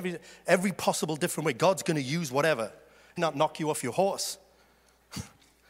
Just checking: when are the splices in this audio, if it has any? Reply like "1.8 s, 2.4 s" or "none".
3.2 s